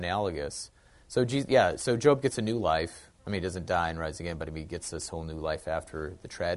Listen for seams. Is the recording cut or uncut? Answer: cut